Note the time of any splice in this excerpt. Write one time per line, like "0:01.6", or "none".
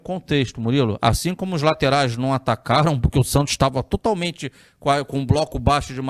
none